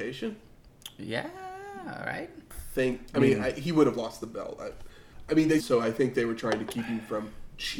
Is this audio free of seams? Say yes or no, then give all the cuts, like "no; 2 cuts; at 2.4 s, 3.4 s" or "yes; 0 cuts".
no; 1 cut; at 5.6 s